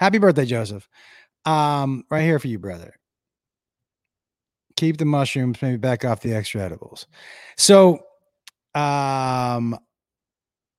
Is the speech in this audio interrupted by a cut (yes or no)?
no